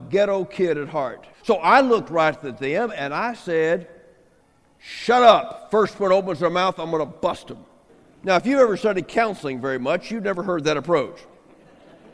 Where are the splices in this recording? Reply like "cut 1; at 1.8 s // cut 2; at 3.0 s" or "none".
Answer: cut 1; at 1.3 s // cut 2; at 4.4 s // cut 3; at 7.9 s